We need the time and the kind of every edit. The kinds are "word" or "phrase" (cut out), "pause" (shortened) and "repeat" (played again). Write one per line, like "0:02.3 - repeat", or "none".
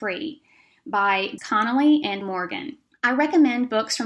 0:01.4 - word
0:02.2 - word
0:02.9 - pause